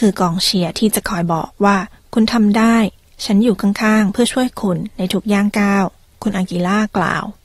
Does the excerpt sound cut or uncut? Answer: uncut